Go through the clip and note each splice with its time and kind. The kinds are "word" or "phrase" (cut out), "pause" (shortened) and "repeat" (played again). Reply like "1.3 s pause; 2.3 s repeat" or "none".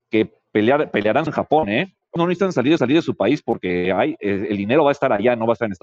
1.3 s word; 2.2 s word; 2.8 s repeat